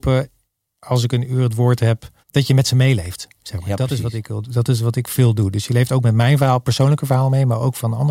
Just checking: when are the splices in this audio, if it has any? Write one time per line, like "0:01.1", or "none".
0:02.2